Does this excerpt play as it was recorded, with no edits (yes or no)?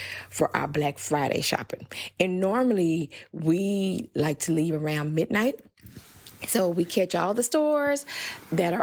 yes